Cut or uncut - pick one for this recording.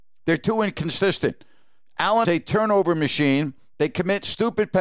cut